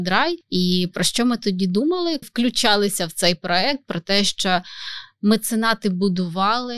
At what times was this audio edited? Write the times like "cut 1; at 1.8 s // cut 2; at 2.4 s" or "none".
cut 1; at 2.2 s